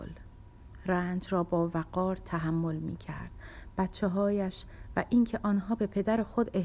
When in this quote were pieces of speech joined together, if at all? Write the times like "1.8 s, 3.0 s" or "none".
none